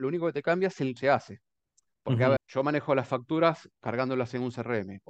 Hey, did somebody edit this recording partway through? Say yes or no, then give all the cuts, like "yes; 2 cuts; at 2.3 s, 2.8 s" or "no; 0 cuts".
yes; 2 cuts; at 1.0 s, 2.4 s